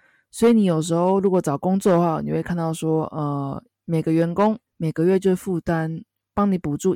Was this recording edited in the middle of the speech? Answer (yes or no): yes